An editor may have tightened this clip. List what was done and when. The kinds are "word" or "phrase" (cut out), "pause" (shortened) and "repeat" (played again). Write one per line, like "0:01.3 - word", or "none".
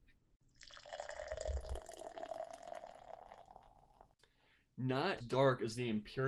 0:05.2 - word